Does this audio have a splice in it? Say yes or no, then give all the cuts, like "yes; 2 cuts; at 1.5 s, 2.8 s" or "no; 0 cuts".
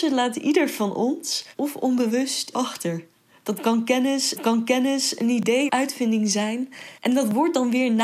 yes; 5 cuts; at 1.6 s, 2.5 s, 4.4 s, 5.7 s, 7.0 s